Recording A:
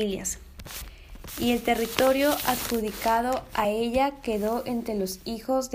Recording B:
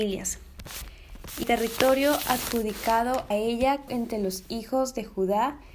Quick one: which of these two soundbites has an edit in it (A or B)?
B